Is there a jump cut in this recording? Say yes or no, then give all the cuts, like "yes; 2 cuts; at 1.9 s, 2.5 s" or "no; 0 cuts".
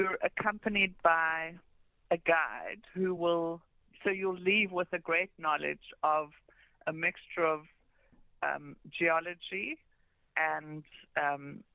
no; 0 cuts